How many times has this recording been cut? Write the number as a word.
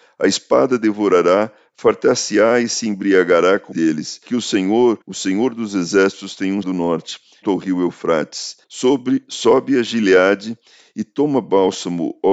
six